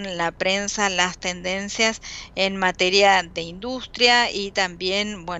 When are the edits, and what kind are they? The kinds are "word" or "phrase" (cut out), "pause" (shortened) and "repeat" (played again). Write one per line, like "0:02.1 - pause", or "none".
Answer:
none

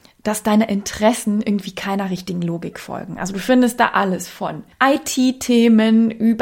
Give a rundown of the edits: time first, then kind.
0:04.7 - pause

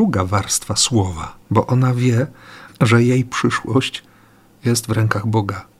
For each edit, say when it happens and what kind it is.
0:01.4 - pause
0:02.7 - word

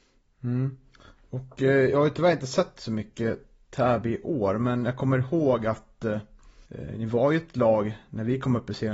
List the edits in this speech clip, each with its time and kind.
0:06.7 - pause

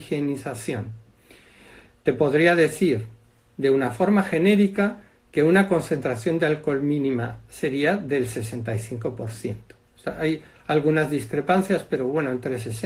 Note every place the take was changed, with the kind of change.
none

